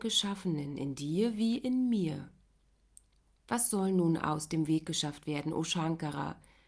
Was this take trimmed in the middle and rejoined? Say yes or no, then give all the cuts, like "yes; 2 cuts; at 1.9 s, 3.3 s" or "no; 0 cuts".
no; 0 cuts